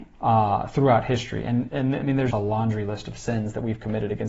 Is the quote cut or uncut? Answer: cut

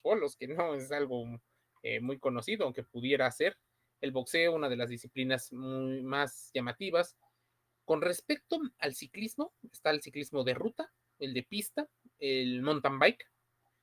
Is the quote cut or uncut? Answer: uncut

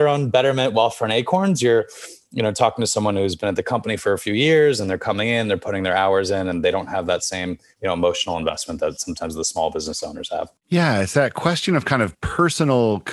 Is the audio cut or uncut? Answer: cut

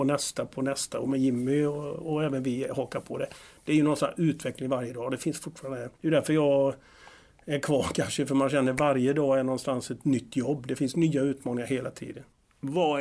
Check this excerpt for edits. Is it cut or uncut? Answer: cut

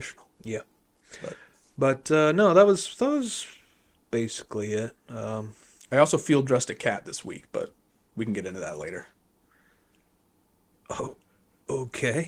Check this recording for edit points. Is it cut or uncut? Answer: uncut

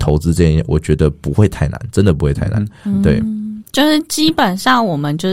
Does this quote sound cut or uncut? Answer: uncut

